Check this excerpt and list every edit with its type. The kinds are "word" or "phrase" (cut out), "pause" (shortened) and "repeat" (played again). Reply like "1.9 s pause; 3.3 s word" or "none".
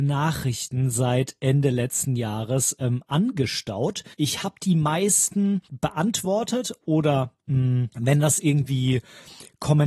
4.1 s pause; 5.6 s pause; 7.9 s pause